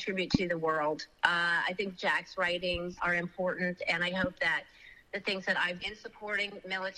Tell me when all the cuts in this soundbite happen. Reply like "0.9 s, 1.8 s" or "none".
3.0 s, 5.8 s

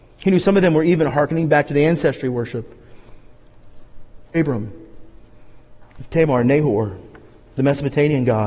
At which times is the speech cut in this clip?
4.3 s

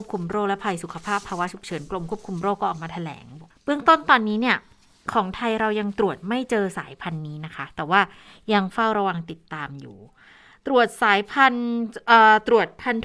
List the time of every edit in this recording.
3.5 s

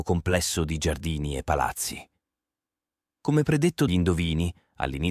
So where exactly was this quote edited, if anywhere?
3.9 s

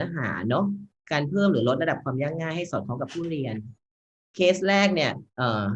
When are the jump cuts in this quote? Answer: none

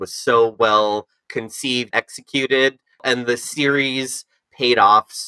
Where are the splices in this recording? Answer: 1.9 s

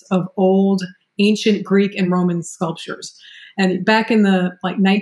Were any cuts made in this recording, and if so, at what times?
none

